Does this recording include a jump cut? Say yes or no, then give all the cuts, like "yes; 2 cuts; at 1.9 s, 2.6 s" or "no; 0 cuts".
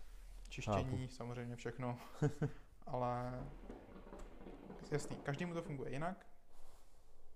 no; 0 cuts